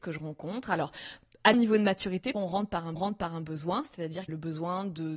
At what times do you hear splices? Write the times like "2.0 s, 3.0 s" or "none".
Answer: 1.5 s, 2.3 s, 3.0 s, 4.3 s